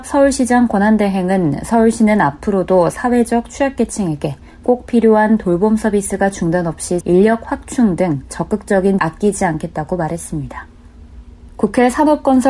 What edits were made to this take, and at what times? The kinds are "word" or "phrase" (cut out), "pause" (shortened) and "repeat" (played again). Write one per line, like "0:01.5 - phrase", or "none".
0:07.0 - word
0:09.0 - word

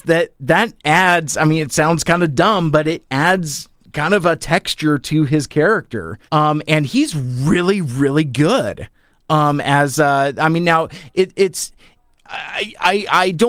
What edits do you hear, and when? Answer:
0:06.3 - pause

